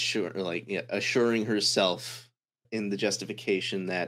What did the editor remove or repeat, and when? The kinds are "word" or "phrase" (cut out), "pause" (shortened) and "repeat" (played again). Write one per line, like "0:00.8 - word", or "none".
0:02.6 - word